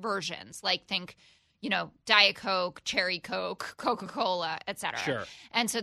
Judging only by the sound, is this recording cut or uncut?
uncut